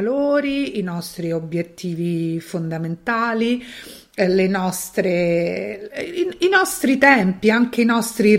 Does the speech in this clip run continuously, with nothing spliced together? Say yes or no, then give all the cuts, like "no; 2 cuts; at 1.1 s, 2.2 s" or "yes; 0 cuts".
yes; 0 cuts